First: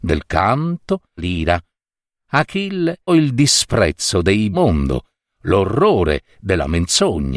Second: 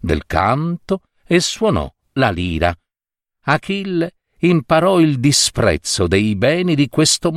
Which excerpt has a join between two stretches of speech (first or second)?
first